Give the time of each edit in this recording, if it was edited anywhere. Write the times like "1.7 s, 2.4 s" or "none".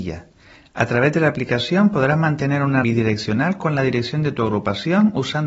2.8 s

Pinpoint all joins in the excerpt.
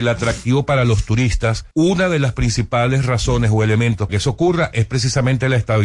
1.7 s, 4.1 s

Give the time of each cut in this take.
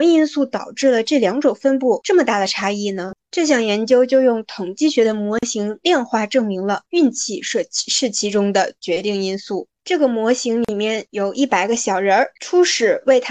12.4 s

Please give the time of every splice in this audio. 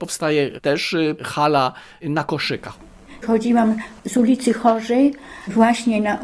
none

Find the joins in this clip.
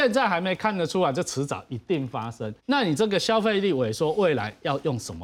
2.6 s

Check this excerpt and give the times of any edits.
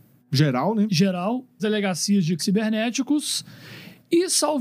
1.6 s, 2.4 s

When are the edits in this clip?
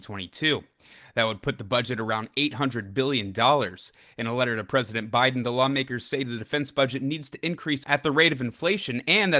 none

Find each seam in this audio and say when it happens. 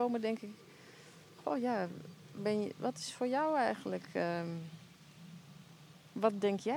2.4 s, 2.8 s

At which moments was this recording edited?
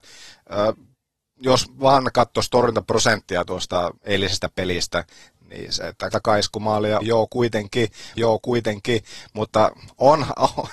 4.0 s, 6.1 s, 7.0 s, 8.2 s

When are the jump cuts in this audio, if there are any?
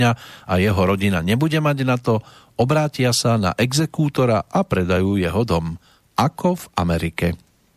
none

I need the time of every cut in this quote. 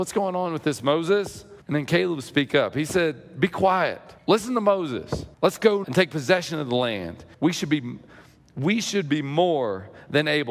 1.6 s, 4.2 s, 5.3 s, 5.8 s, 7.3 s

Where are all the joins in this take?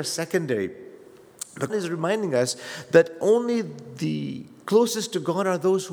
1.7 s

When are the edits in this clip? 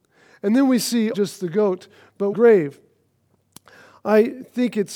1.1 s, 2.3 s

